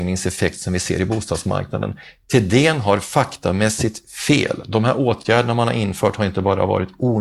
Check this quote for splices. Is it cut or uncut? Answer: uncut